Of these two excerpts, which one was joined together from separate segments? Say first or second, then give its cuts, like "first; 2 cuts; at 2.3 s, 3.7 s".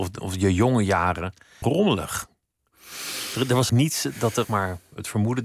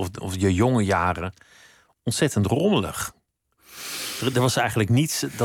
first; 3 cuts; at 1.6 s, 3.7 s, 4.4 s